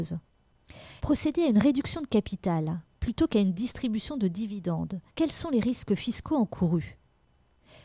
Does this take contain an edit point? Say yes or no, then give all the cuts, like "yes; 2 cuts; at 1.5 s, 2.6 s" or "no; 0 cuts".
yes; 2 cuts; at 1.0 s, 5.1 s